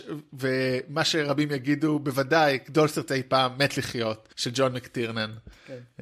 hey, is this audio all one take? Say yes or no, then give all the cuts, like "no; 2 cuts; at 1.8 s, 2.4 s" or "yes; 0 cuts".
no; 2 cuts; at 3.1 s, 4.3 s